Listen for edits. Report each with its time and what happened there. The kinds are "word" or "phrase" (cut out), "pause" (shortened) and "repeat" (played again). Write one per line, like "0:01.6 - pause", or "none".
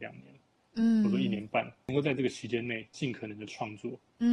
none